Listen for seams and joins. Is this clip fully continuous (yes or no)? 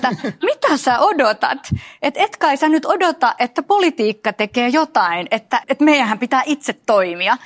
no